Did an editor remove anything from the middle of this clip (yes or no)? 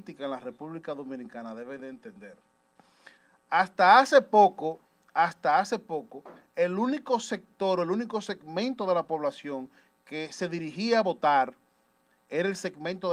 no